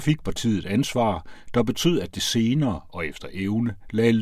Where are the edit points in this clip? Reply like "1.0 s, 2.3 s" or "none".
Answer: none